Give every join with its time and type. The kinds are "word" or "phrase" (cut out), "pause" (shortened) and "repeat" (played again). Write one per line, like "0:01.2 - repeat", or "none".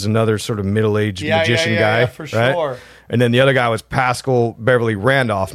none